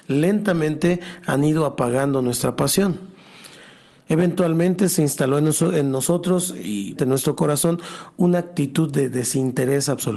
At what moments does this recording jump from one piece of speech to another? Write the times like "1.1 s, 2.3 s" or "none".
7.0 s